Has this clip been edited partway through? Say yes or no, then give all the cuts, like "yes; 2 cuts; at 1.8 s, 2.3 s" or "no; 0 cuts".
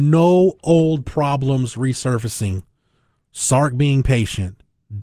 no; 0 cuts